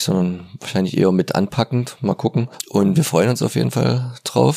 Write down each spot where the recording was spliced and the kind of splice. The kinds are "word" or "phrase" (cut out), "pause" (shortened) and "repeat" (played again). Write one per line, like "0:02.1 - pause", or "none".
none